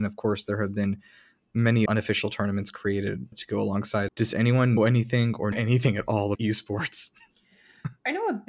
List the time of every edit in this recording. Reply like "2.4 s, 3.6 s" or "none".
1.9 s, 3.3 s, 4.1 s, 4.8 s, 5.5 s, 6.3 s